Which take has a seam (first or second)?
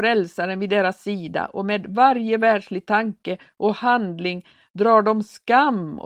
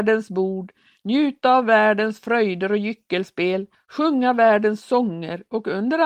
second